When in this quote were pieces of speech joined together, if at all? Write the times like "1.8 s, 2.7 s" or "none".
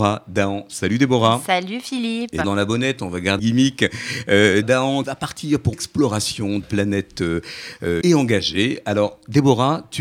2.4 s, 3.4 s, 4.6 s, 5.0 s, 5.7 s, 6.6 s, 8.0 s